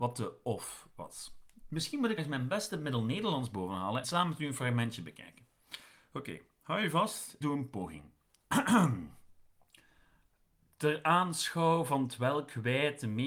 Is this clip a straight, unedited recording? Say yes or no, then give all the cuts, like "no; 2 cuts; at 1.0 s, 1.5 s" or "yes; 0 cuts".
no; 3 cuts; at 2.2 s, 4.0 s, 7.4 s